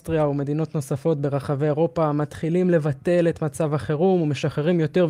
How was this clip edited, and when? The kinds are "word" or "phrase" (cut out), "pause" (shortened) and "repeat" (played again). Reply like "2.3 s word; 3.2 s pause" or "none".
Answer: none